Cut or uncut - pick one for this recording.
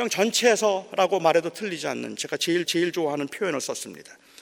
cut